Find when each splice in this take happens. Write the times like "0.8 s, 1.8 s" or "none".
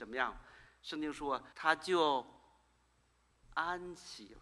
1.5 s